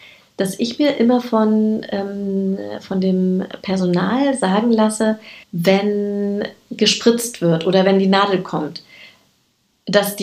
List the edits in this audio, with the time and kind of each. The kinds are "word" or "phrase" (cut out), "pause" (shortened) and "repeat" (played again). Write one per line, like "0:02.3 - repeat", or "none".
0:05.4 - pause